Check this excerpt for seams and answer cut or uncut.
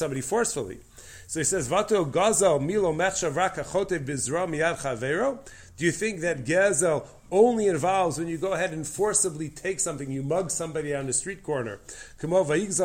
uncut